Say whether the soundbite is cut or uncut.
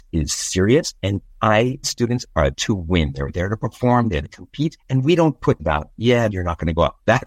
cut